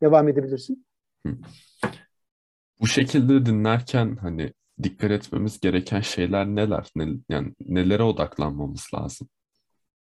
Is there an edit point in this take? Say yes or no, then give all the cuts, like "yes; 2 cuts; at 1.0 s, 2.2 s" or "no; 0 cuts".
no; 0 cuts